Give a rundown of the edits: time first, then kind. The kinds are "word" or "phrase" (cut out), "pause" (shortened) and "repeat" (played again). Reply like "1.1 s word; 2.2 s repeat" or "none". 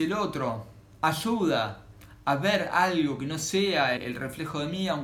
4.0 s word

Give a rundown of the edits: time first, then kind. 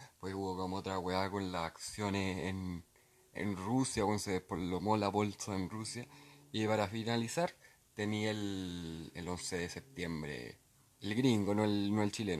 none

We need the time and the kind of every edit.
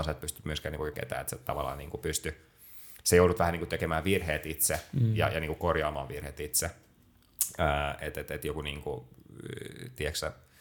0.9 s word

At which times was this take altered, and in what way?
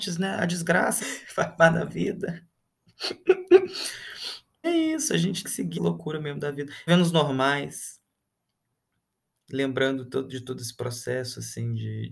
1.0 s word; 4.6 s word; 5.4 s word; 5.7 s word; 6.9 s word

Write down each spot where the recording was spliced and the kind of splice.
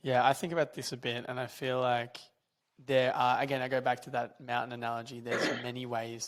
2.6 s pause

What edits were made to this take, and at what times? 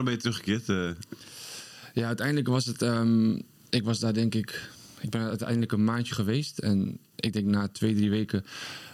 none

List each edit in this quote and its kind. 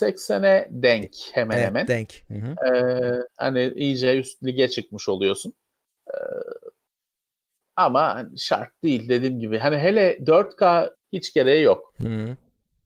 5.7 s pause; 10.9 s phrase

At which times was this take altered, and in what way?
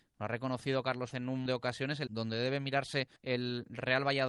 1.1 s word; 1.5 s word; 2.1 s word; 3.2 s pause

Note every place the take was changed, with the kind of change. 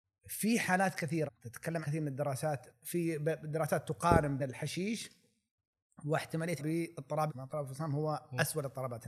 1.3 s word; 1.8 s word; 2.7 s word; 4.4 s word; 6.6 s word; 7.3 s word

